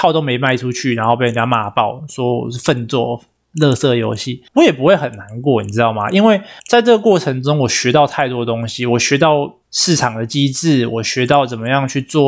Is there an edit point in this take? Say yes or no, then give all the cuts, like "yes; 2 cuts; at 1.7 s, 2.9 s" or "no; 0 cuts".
yes; 3 cuts; at 4.5 s, 6.6 s, 9.6 s